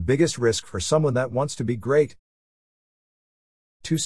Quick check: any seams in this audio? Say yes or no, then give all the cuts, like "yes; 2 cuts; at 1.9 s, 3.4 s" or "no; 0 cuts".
no; 0 cuts